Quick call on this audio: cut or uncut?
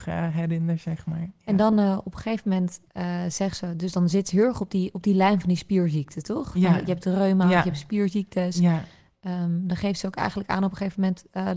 uncut